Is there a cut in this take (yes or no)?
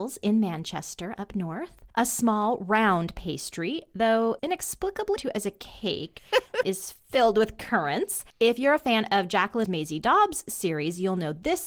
yes